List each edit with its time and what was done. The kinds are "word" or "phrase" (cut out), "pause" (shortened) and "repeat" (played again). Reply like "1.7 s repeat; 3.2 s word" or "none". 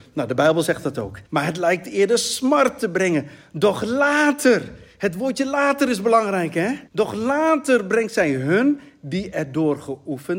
1.3 s pause; 6.9 s pause